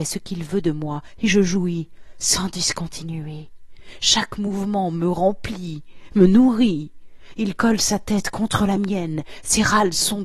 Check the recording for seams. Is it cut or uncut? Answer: uncut